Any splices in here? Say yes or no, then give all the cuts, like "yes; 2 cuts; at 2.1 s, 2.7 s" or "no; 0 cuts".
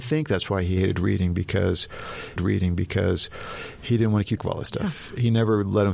yes; 2 cuts; at 2.4 s, 4.4 s